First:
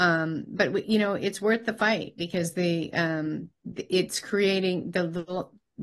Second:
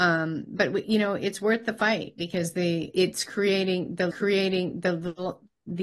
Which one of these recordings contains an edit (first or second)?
second